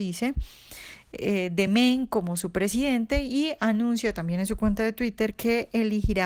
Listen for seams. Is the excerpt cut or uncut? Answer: uncut